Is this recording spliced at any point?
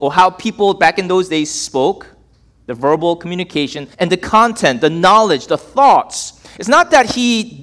yes; 1 cut; at 3.9 s

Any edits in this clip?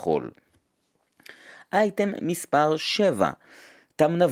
no; 0 cuts

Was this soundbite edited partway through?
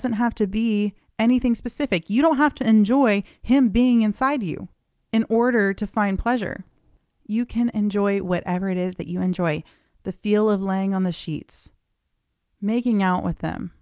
no; 0 cuts

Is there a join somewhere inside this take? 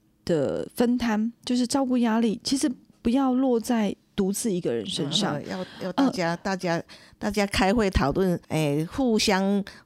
yes; 1 cut; at 8.4 s

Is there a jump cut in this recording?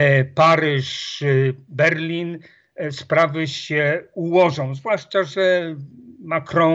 no; 0 cuts

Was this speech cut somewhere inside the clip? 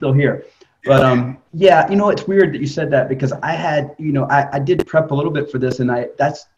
yes; 1 cut; at 1.5 s

